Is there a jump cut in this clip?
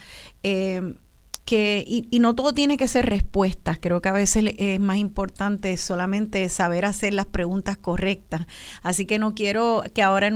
yes; 1 cut; at 1.4 s

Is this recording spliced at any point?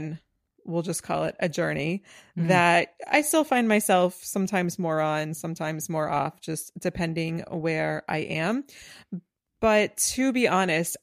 no; 0 cuts

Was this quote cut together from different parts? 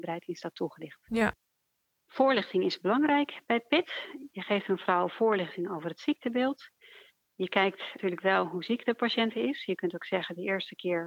no; 0 cuts

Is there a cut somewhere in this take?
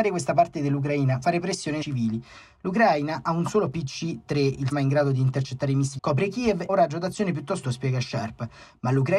yes; 7 cuts; at 1.2 s, 1.8 s, 3.7 s, 4.7 s, 6.0 s, 6.7 s, 7.6 s

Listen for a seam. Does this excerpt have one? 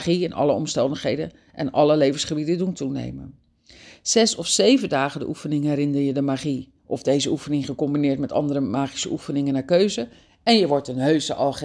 no; 0 cuts

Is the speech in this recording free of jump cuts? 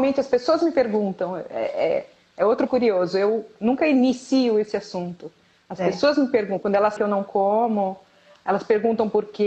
no; 2 cuts; at 2.7 s, 7.0 s

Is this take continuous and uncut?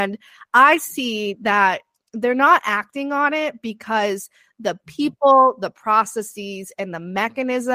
yes; 0 cuts

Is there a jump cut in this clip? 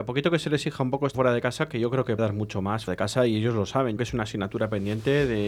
yes; 4 cuts; at 1.1 s, 2.2 s, 2.9 s, 4.0 s

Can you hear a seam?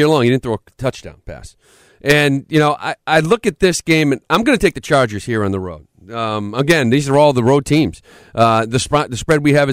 no; 0 cuts

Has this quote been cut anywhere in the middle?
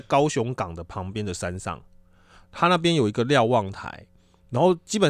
no; 0 cuts

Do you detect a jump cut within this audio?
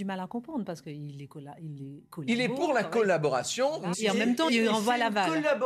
yes; 2 cuts; at 3.9 s, 4.5 s

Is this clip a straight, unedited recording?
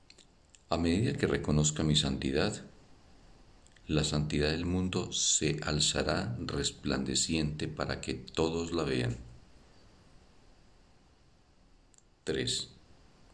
yes; 0 cuts

